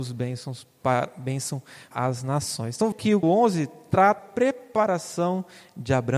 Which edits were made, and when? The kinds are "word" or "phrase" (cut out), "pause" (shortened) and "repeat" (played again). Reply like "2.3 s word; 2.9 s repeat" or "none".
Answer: 1.9 s word; 2.9 s word; 3.2 s word; 4.2 s word

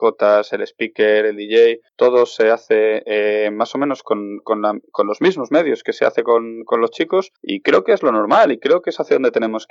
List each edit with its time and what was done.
1.9 s pause; 7.4 s pause

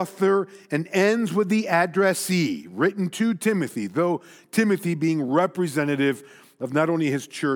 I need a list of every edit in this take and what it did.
none

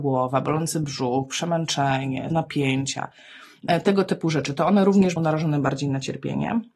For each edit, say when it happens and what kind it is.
2.3 s word; 5.2 s word

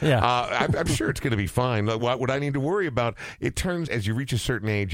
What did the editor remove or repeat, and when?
2.0 s word; 3.9 s word

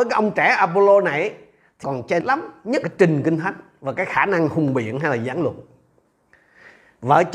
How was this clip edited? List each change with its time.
1.8 s phrase; 2.2 s word; 2.8 s word

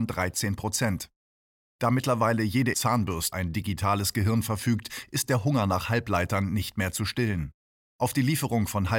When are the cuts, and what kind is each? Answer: 2.7 s word; 3.3 s word

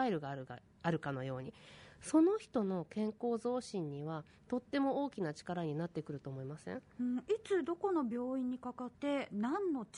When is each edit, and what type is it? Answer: 8.9 s pause

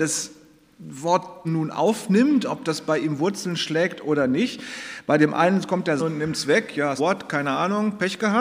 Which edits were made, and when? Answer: 1.4 s word; 6.0 s word; 7.0 s word

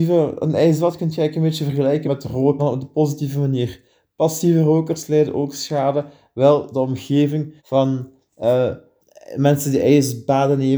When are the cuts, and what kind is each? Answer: 2.0 s word; 2.6 s word; 7.6 s pause; 9.0 s pause

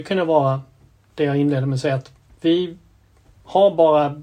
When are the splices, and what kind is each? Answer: 2.3 s pause

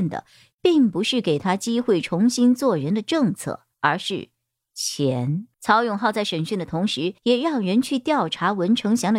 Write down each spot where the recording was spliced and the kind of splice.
3.7 s pause; 5.5 s pause; 7.2 s pause

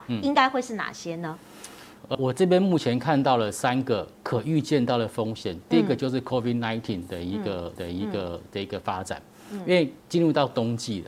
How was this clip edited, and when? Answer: 2.1 s word; 4.2 s pause; 7.8 s repeat; 10.0 s pause

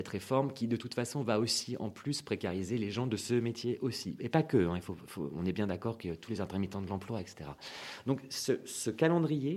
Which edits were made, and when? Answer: none

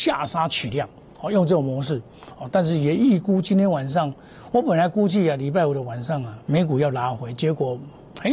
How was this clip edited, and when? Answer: 6.4 s pause

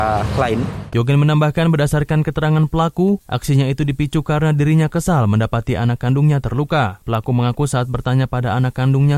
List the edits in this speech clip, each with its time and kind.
none

